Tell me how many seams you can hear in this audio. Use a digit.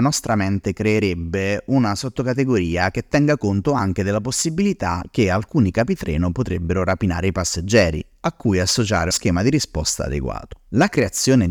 1